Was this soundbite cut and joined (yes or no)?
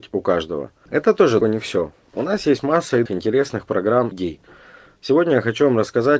yes